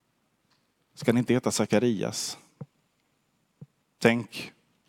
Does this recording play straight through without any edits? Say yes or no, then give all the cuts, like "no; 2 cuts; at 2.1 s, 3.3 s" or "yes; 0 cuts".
yes; 0 cuts